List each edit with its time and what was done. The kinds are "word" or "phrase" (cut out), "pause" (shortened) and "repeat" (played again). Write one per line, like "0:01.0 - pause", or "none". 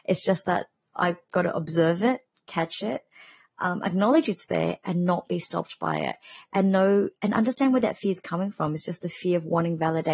none